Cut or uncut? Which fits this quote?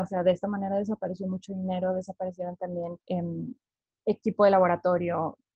cut